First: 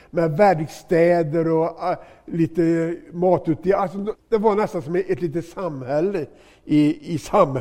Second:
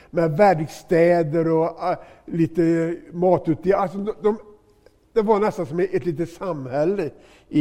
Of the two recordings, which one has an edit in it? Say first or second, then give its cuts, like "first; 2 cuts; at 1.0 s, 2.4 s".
first; 1 cut; at 4.1 s